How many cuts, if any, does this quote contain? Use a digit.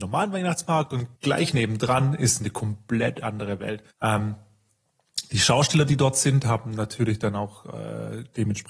2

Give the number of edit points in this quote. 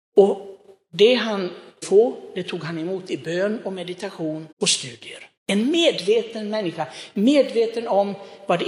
3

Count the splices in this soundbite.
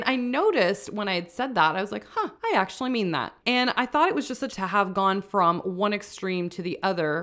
3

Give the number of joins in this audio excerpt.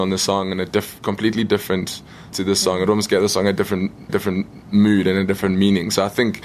2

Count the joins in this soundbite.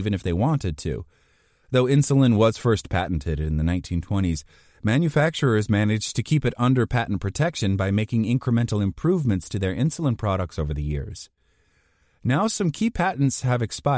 0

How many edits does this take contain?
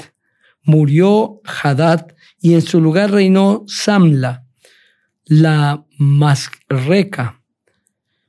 0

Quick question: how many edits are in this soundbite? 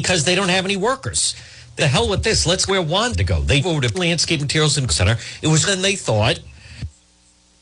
7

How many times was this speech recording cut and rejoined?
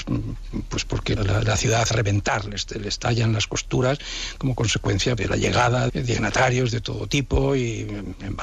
4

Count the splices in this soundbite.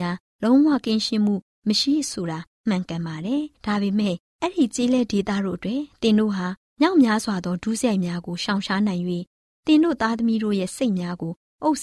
0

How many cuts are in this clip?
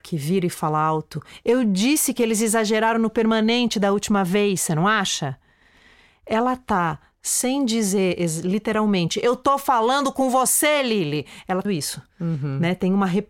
1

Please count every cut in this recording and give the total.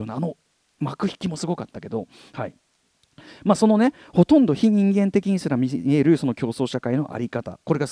0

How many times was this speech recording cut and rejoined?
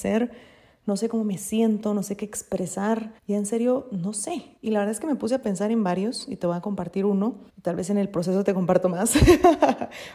3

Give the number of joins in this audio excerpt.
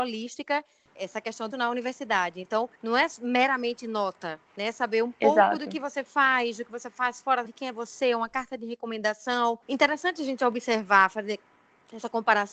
6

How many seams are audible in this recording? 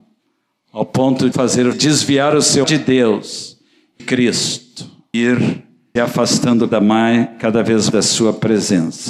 8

